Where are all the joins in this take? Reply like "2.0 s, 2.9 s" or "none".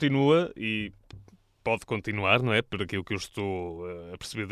none